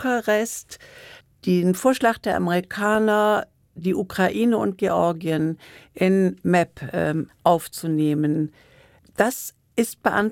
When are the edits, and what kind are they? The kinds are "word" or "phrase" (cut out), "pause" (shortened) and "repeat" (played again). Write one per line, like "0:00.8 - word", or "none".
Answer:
0:07.3 - pause